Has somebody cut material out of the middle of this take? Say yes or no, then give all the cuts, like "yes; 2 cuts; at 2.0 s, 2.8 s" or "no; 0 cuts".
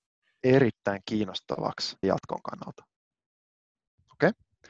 yes; 1 cut; at 2.0 s